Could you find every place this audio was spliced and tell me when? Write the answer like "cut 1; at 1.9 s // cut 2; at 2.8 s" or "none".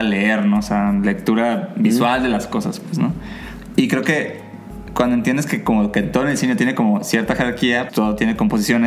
cut 1; at 7.9 s